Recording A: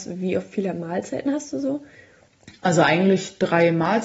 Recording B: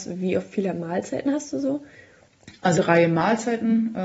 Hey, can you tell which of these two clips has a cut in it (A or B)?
B